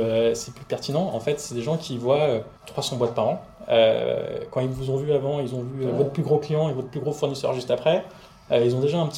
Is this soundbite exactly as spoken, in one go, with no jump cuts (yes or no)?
no